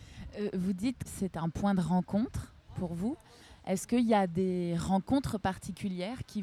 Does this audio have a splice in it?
yes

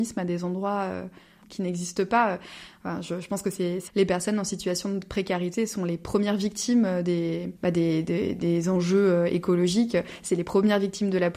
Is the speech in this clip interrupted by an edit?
yes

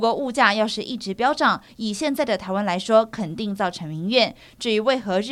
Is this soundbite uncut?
yes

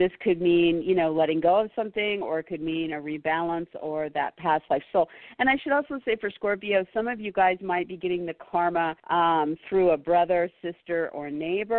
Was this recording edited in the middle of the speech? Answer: yes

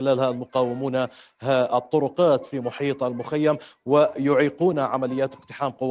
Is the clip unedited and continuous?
yes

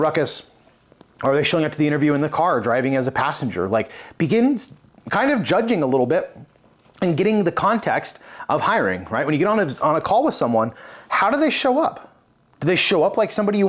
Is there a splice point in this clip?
no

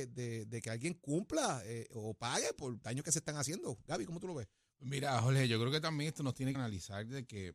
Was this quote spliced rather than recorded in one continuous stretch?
yes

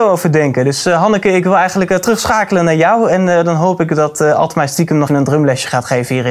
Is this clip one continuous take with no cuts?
no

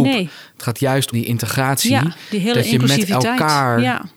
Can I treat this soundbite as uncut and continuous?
no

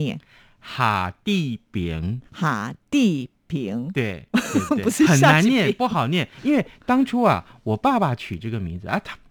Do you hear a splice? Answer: yes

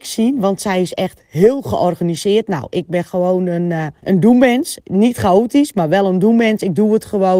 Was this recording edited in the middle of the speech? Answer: yes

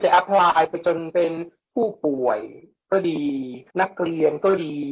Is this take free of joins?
no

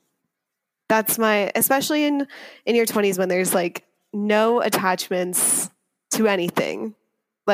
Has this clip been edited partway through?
no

